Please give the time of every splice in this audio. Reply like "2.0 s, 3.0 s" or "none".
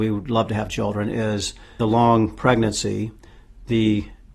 none